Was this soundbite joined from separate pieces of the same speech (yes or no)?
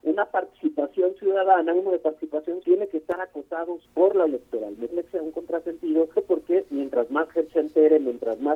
yes